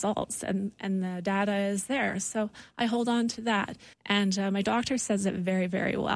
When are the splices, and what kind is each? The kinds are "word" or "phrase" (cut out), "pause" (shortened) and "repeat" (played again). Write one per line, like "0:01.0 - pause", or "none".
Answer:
0:03.9 - pause